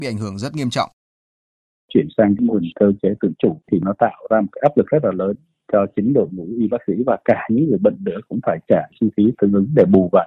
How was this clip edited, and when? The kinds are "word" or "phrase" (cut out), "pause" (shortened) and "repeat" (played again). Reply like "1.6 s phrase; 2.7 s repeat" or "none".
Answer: none